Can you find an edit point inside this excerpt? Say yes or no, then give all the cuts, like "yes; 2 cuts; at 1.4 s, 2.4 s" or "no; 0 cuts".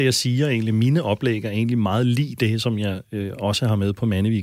no; 0 cuts